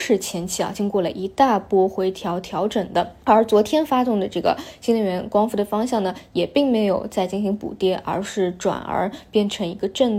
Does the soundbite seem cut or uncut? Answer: cut